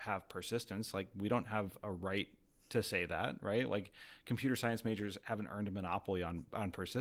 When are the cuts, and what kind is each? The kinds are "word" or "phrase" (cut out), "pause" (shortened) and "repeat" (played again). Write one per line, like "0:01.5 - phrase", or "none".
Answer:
none

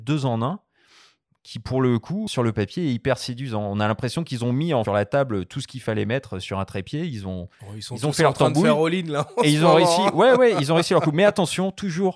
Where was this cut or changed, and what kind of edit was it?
0:02.3 - word
0:04.8 - phrase

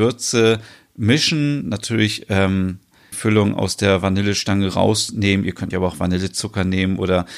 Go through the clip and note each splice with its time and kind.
0:03.1 - word
0:05.7 - word

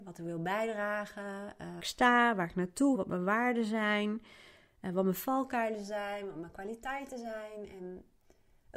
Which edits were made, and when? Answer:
0:01.8 - phrase
0:02.9 - word

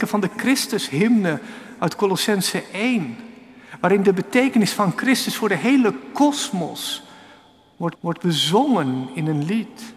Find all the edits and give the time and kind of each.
0:07.9 - repeat

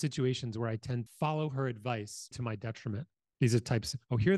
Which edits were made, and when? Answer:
0:01.1 - word
0:02.3 - word

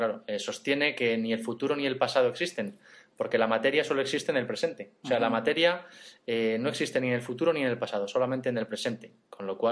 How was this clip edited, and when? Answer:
none

